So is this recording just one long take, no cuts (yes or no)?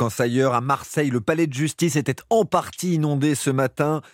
yes